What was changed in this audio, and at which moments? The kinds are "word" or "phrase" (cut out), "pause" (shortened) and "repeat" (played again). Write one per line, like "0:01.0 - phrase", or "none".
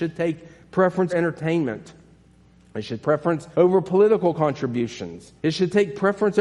0:01.1 - word
0:03.0 - word
0:03.5 - pause
0:05.4 - pause